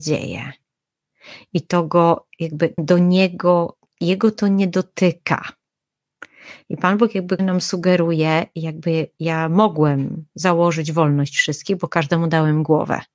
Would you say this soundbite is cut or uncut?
cut